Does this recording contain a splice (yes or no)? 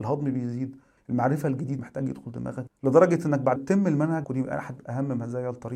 yes